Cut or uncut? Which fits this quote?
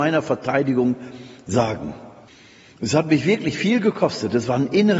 uncut